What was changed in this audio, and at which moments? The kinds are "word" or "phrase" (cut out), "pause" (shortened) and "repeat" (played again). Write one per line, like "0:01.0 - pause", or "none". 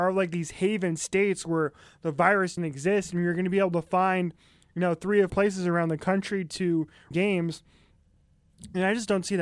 0:02.6 - word
0:05.3 - word
0:07.1 - word